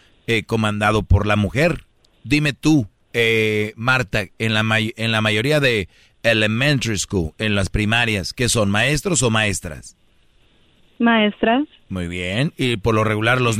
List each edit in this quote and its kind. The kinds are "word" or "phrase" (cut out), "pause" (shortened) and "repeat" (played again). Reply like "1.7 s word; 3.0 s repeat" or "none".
none